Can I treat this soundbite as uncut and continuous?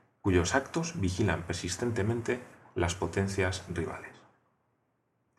yes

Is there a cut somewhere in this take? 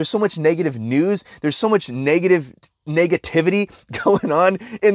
yes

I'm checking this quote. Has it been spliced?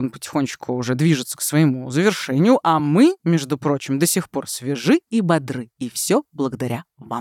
no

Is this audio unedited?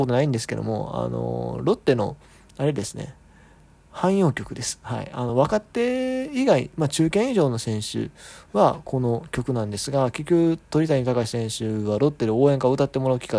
yes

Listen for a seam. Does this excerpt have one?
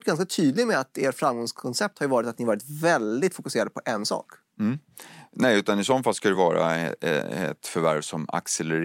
no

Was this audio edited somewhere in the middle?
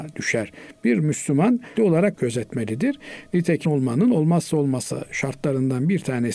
yes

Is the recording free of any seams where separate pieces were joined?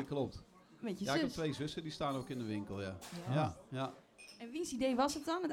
yes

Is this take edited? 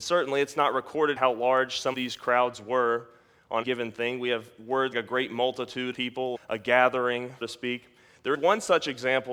yes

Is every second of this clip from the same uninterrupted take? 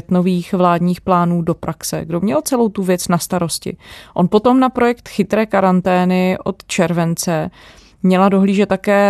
yes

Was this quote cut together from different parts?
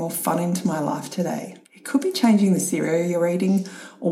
yes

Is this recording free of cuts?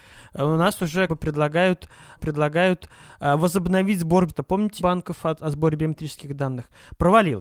no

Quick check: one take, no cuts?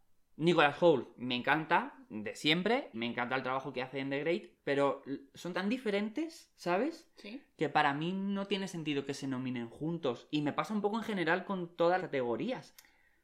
no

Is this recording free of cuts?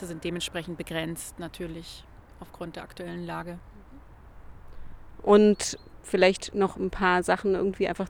yes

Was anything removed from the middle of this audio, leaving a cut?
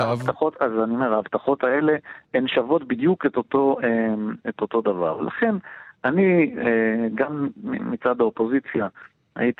no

